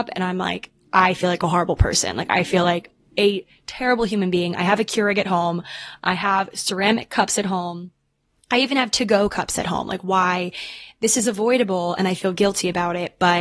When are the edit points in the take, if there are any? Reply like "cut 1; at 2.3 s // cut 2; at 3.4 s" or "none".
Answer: none